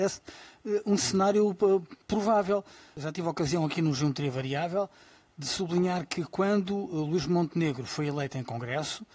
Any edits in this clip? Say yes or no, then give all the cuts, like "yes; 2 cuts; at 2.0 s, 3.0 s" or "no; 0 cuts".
no; 0 cuts